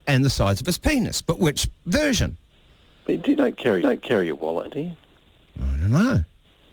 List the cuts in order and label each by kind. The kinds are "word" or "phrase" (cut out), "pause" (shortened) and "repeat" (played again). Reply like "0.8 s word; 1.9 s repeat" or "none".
3.8 s repeat; 4.7 s phrase